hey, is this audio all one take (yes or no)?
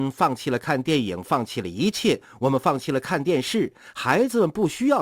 yes